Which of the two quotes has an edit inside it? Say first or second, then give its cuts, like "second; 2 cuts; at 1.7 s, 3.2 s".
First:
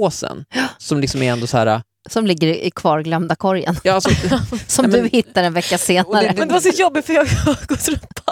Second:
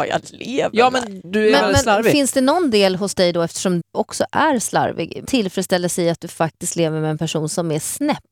second; 3 cuts; at 1.2 s, 3.8 s, 5.2 s